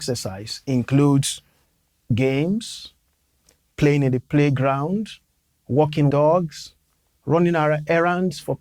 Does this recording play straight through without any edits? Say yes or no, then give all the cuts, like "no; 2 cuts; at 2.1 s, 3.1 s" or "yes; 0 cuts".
no; 2 cuts; at 2.1 s, 6.1 s